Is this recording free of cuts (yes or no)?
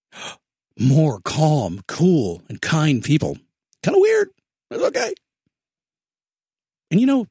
yes